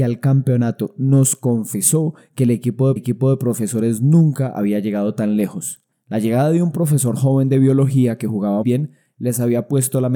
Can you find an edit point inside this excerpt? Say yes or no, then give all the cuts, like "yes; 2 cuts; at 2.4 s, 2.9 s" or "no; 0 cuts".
yes; 3 cuts; at 3.0 s, 5.9 s, 8.6 s